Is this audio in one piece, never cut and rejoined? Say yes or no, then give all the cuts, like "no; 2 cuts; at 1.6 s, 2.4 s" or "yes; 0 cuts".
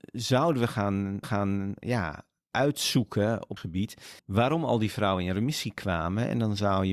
no; 3 cuts; at 1.2 s, 3.6 s, 4.2 s